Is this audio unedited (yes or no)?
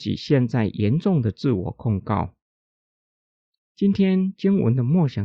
yes